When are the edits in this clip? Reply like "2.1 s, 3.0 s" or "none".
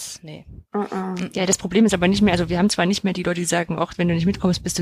none

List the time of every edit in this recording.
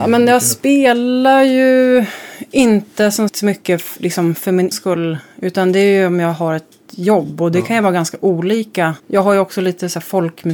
3.3 s, 4.7 s, 9.0 s

